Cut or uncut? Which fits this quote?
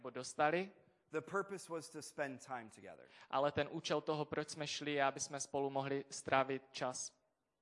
uncut